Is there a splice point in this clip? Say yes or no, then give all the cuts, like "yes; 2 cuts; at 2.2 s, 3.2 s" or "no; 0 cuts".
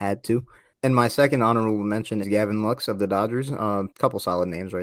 yes; 2 cuts; at 2.2 s, 3.9 s